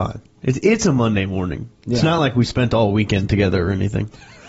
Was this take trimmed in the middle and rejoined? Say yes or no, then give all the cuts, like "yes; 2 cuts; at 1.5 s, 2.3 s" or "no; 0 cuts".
no; 0 cuts